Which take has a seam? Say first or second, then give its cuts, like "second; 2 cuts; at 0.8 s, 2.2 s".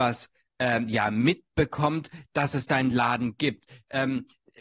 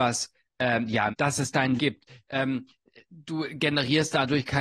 second; 2 cuts; at 1.1 s, 1.8 s